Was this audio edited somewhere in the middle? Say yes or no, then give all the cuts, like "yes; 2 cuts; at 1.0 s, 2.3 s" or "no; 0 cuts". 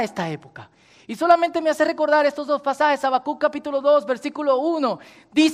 no; 0 cuts